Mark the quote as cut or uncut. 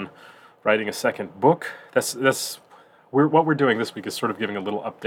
uncut